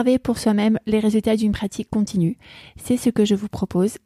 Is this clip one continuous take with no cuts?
yes; 0 cuts

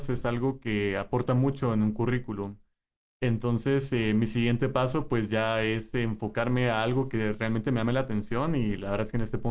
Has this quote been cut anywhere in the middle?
no; 0 cuts

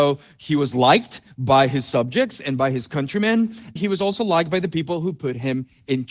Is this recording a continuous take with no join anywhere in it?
no; 1 cut; at 3.8 s

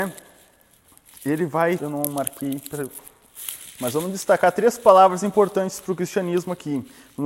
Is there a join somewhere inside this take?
yes; 1 cut; at 1.8 s

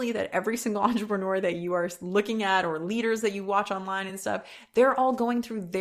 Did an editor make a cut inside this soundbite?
no; 0 cuts

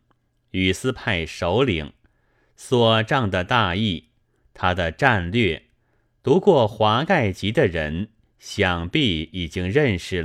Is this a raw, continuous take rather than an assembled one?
yes; 0 cuts

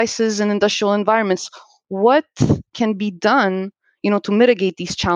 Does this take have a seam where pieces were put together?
no; 0 cuts

